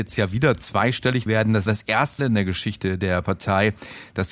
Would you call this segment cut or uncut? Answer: cut